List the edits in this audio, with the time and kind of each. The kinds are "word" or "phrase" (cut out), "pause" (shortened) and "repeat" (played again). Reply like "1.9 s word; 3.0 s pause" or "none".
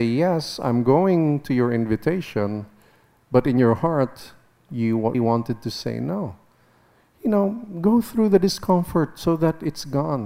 5.1 s word